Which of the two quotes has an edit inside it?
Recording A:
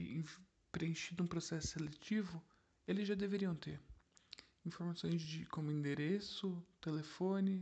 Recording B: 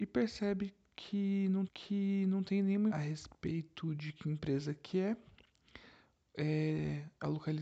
B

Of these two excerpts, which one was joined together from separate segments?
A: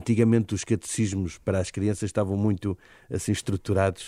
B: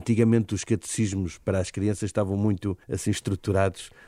B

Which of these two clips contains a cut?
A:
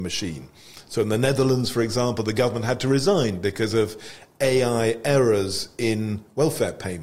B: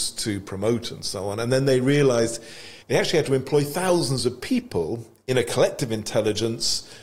B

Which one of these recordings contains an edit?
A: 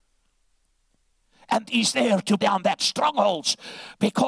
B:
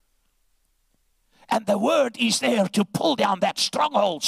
A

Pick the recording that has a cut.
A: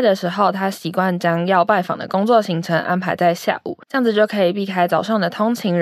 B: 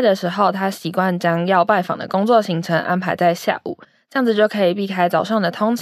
A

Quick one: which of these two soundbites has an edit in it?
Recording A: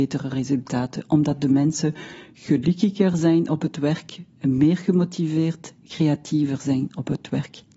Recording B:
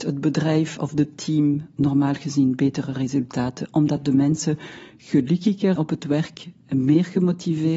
B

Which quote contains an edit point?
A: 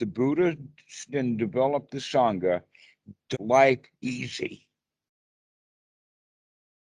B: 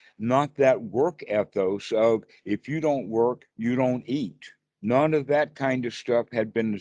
A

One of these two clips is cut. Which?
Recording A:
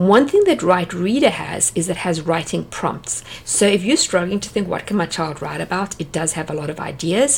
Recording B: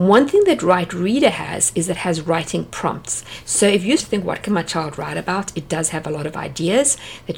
B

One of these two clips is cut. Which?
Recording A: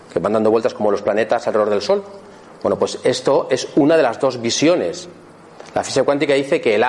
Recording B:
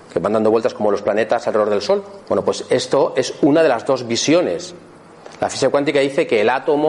B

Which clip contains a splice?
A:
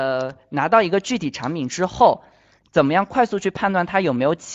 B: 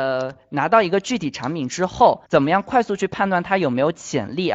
B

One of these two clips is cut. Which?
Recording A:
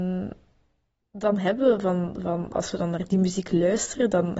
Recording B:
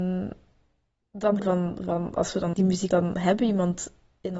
B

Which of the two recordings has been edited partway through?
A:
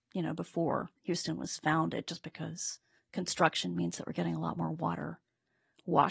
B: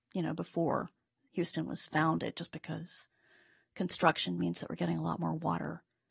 A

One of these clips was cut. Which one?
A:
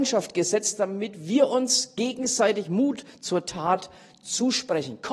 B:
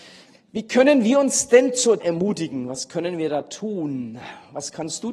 B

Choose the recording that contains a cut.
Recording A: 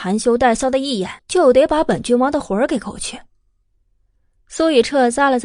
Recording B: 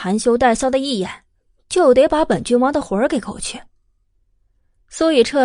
A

